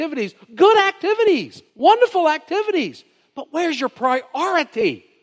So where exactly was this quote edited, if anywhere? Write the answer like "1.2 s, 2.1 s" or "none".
1.7 s